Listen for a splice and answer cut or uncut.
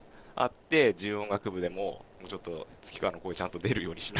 cut